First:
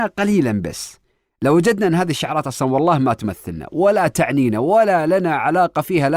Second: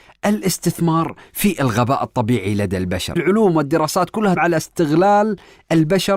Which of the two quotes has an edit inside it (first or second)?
second